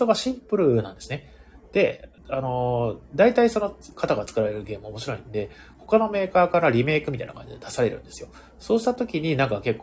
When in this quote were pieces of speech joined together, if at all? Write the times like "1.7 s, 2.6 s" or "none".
2.2 s